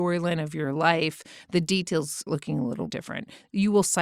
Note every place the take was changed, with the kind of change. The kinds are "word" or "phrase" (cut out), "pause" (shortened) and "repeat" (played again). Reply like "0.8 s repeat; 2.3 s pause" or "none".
2.3 s word; 2.9 s word

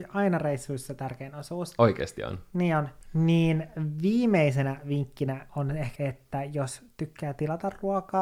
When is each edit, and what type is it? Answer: 5.5 s word; 6.0 s word

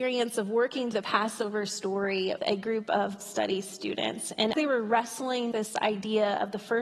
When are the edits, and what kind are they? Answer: 0.9 s word; 2.4 s word; 3.2 s word; 4.5 s word; 5.5 s word

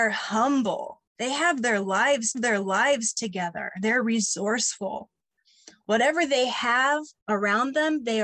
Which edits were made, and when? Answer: 1.1 s pause; 2.3 s repeat; 7.2 s pause

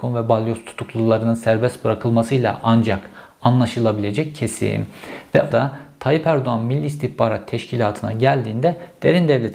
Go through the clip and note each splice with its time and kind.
5.5 s word

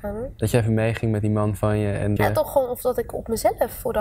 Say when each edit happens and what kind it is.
2.2 s word

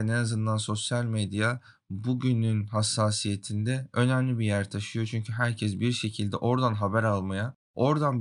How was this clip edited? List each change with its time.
none

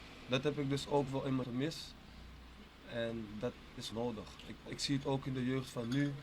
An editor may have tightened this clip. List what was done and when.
1.4 s word; 3.9 s word; 4.7 s word

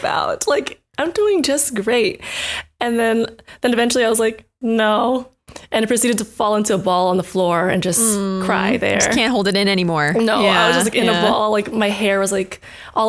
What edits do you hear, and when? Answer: none

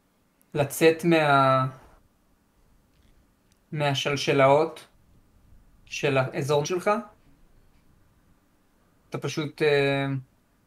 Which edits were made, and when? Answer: 6.6 s word; 9.1 s word

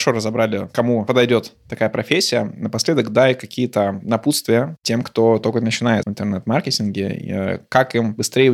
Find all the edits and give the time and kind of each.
6.0 s phrase

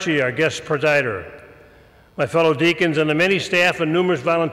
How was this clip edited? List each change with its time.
none

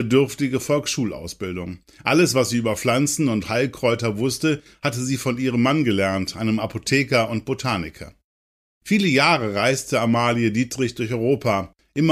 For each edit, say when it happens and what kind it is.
none

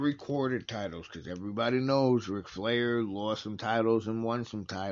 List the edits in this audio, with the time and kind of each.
none

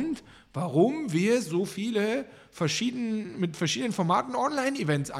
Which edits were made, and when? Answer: none

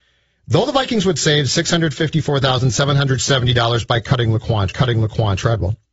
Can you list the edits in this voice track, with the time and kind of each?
4.7 s repeat

